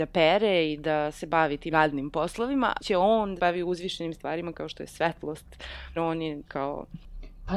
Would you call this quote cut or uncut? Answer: cut